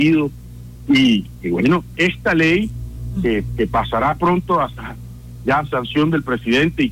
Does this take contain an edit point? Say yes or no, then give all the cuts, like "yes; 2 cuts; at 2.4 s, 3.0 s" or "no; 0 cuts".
yes; 1 cut; at 1.9 s